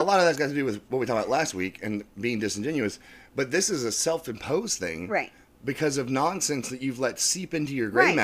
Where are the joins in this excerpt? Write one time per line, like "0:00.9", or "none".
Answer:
none